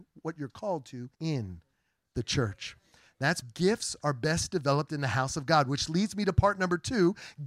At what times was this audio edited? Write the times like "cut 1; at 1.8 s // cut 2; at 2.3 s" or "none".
cut 1; at 1.1 s // cut 2; at 3.4 s